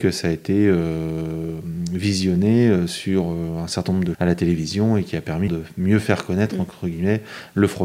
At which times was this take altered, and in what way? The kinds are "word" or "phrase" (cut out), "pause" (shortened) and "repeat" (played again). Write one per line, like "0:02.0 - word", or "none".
0:04.1 - word
0:05.5 - word